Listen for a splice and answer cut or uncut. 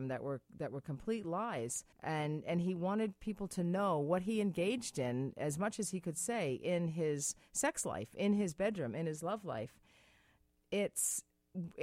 cut